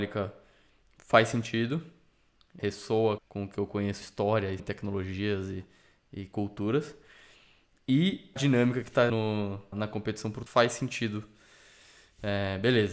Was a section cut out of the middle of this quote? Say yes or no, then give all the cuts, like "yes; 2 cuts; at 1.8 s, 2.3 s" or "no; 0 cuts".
yes; 8 cuts; at 2.6 s, 3.2 s, 4.0 s, 4.6 s, 8.4 s, 9.1 s, 9.7 s, 10.5 s